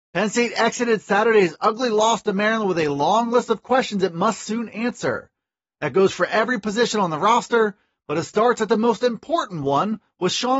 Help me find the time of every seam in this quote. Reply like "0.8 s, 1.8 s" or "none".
none